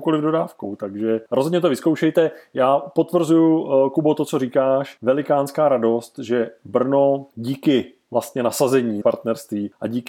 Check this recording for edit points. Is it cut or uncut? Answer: cut